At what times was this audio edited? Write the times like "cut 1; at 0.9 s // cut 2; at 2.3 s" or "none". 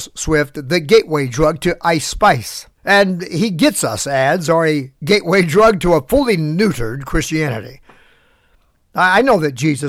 cut 1; at 2.8 s // cut 2; at 5.0 s